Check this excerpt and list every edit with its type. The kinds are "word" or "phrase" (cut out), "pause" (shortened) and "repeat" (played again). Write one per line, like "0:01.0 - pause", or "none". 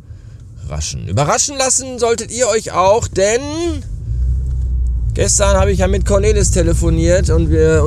none